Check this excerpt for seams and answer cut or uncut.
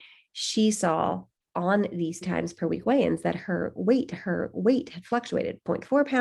cut